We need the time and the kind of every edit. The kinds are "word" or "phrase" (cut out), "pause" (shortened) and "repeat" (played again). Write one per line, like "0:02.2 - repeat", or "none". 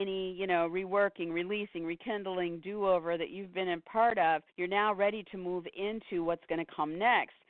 0:04.5 - pause